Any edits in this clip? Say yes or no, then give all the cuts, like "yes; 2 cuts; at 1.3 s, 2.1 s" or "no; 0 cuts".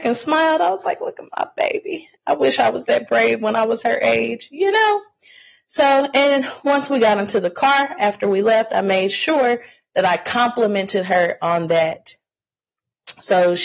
no; 0 cuts